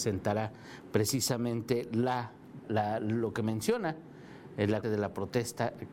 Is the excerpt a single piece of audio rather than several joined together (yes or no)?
no